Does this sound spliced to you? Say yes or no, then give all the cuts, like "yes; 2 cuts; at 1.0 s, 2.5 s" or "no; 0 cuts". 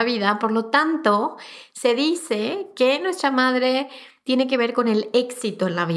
no; 0 cuts